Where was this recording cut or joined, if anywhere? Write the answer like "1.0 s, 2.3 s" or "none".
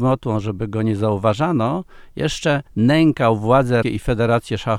2.7 s, 3.8 s